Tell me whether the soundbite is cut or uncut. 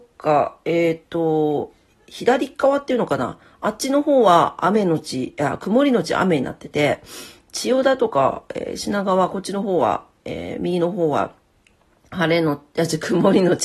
uncut